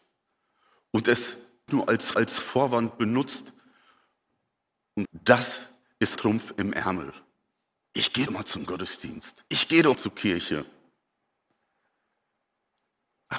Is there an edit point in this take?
yes; 8 cuts; at 1.7 s, 2.1 s, 5.0 s, 6.2 s, 7.7 s, 8.3 s, 9.5 s, 9.9 s

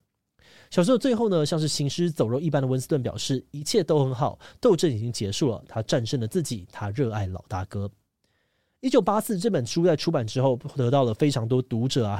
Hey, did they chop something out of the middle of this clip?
no; 0 cuts

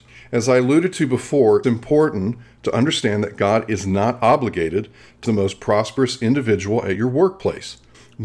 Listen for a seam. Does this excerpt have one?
yes; 2 cuts; at 1.6 s, 5.2 s

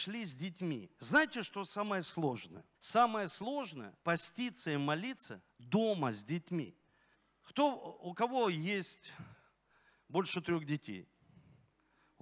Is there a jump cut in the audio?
yes; 5 cuts; at 0.9 s, 2.7 s, 4.0 s, 5.5 s, 7.1 s

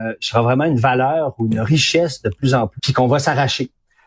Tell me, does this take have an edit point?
yes; 1 cut; at 2.8 s

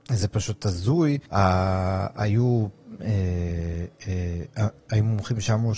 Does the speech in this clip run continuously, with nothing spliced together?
no; 1 cut; at 1.3 s

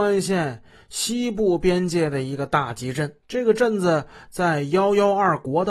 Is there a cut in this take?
yes; 1 cut; at 3.2 s

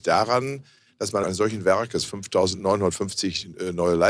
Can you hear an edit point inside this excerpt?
yes; 1 cut; at 1.2 s

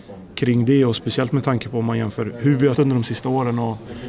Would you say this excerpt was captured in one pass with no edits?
no; 1 cut; at 2.7 s

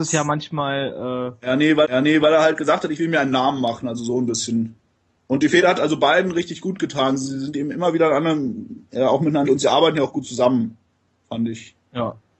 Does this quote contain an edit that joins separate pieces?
yes; 3 cuts; at 1.8 s, 5.1 s, 9.4 s

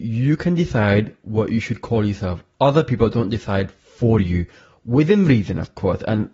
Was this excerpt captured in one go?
yes; 0 cuts

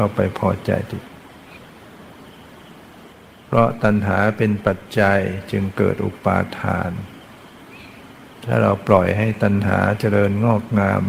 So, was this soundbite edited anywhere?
no; 0 cuts

